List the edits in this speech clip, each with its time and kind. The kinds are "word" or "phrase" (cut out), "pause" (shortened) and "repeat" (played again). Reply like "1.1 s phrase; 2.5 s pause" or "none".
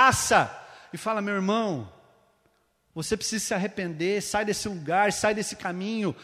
none